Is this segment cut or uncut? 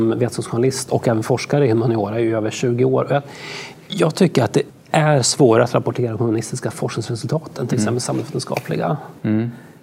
cut